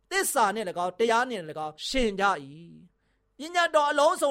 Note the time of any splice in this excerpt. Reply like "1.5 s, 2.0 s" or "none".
1.8 s